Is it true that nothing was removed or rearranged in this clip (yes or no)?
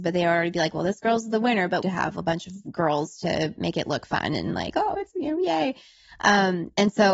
no